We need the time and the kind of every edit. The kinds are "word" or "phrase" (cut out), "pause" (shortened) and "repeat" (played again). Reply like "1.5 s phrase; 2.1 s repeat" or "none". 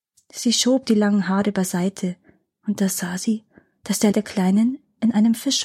4.1 s word